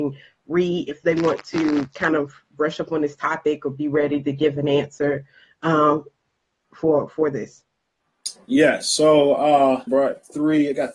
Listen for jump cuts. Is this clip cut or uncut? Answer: cut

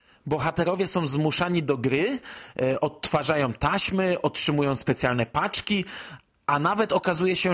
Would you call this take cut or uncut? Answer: uncut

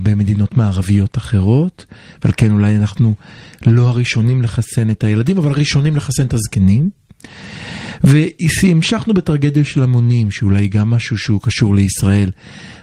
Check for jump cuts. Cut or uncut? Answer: uncut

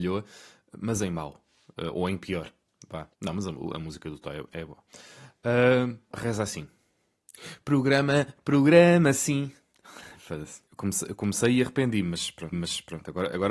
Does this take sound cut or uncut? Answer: cut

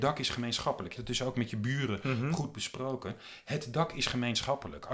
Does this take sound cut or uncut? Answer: cut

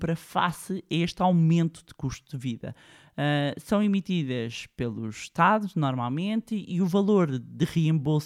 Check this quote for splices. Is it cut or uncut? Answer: uncut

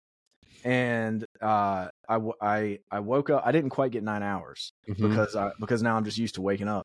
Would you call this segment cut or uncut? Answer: cut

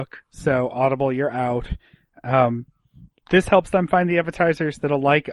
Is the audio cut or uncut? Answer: uncut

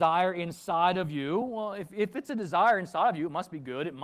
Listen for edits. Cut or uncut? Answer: uncut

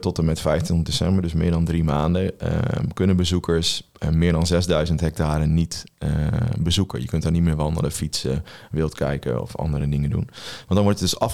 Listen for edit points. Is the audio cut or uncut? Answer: uncut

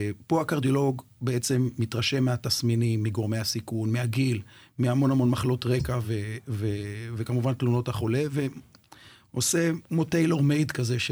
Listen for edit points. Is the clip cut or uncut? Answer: uncut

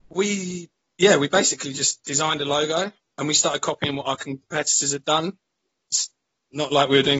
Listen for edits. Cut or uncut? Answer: uncut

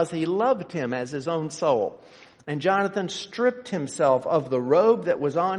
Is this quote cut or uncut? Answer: uncut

